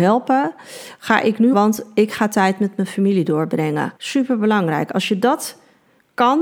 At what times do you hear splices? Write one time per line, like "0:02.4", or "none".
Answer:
0:01.5
0:04.0

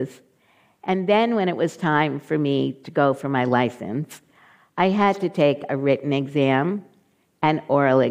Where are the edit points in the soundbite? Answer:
none

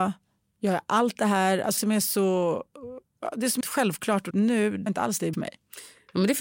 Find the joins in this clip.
0:01.8
0:03.6
0:04.3
0:04.9
0:05.3

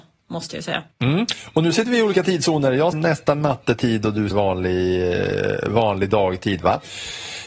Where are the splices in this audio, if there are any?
0:00.9
0:02.9
0:04.3

